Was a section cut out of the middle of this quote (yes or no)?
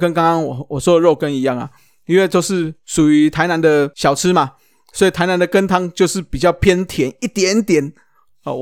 no